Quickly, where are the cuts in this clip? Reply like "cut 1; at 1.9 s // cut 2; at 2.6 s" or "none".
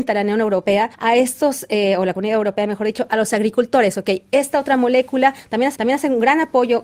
cut 1; at 0.9 s // cut 2; at 5.7 s